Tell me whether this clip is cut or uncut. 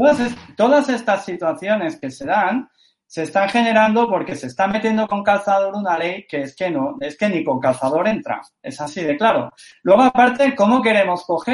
uncut